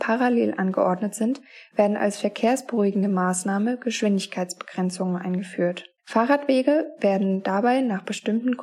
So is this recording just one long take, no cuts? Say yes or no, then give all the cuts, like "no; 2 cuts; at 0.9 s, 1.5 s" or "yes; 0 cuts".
no; 1 cut; at 6.0 s